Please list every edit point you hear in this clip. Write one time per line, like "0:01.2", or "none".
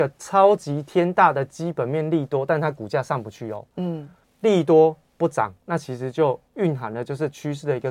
0:04.2
0:06.5